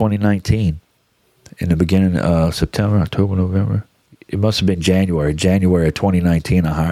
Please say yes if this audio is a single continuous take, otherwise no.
yes